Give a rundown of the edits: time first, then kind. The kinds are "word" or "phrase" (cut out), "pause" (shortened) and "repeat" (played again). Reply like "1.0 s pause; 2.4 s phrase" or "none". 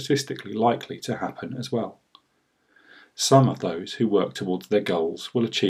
none